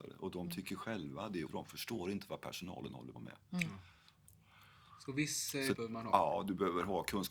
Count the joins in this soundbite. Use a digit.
3